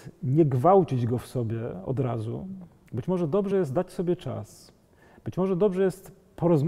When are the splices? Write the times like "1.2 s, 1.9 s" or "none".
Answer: none

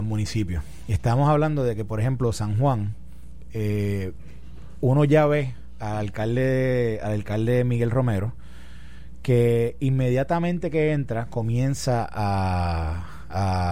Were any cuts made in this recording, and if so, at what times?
none

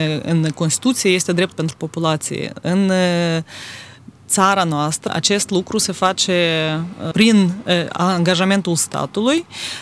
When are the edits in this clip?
1.5 s, 5.1 s, 7.1 s

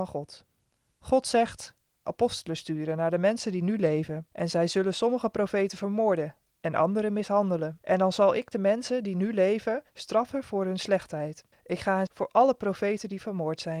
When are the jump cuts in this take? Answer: 2.1 s, 4.3 s, 7.8 s, 11.5 s, 12.1 s

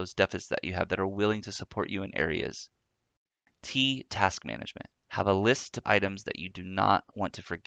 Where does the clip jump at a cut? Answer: 5.0 s, 5.8 s

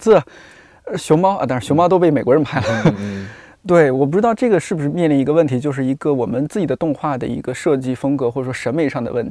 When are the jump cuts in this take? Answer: none

